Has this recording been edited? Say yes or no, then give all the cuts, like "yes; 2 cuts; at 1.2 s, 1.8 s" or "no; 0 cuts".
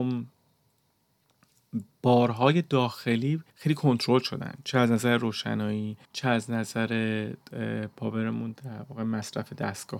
yes; 2 cuts; at 3.5 s, 6.0 s